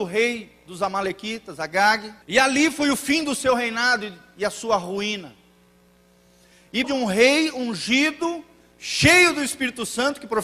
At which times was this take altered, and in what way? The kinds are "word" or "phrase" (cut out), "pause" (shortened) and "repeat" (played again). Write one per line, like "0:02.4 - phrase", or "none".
0:02.2 - pause
0:06.8 - word